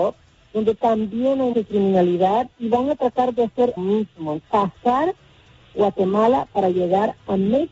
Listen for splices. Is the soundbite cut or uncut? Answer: cut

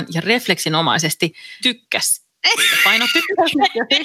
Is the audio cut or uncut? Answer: cut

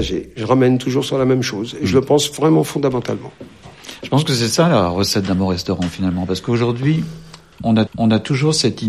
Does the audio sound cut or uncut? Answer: cut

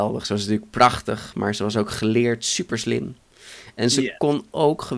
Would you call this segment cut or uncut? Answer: uncut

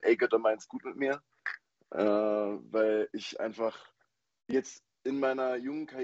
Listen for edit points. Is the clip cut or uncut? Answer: uncut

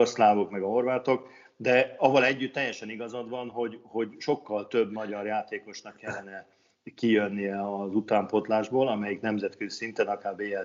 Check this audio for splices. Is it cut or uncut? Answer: uncut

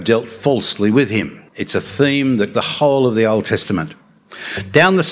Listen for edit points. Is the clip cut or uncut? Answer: cut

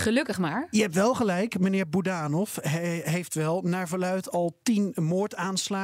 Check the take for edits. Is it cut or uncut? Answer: uncut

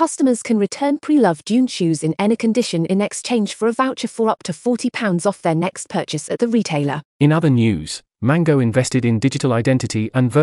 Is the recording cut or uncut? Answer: cut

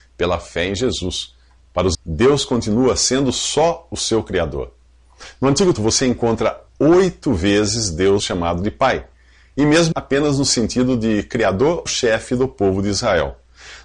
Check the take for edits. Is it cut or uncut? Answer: cut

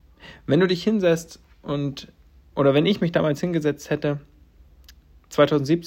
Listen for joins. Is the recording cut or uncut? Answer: uncut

